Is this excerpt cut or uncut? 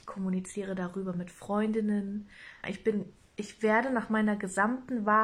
cut